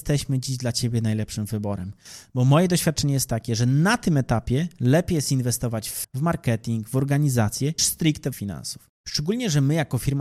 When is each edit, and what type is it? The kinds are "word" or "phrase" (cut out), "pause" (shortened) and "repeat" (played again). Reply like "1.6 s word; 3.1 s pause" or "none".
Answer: 6.0 s word; 7.8 s word; 8.3 s word; 9.0 s pause